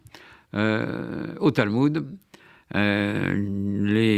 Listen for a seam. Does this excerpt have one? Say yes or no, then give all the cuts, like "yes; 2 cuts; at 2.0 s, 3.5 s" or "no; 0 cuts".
no; 0 cuts